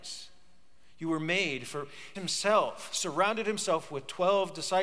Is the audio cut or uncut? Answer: cut